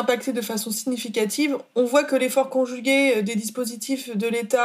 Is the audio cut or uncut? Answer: uncut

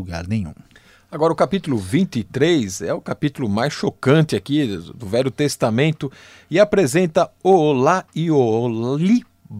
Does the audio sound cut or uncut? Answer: uncut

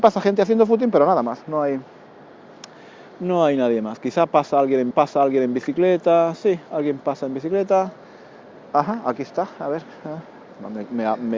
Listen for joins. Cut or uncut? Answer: cut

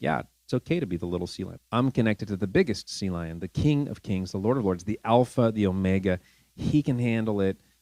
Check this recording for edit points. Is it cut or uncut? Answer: cut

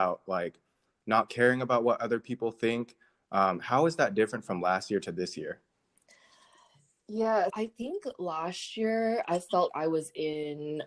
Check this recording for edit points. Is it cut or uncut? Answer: cut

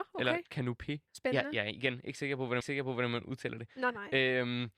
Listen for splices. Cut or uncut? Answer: cut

